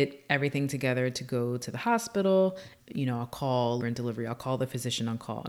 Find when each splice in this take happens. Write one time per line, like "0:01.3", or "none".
0:02.8
0:03.8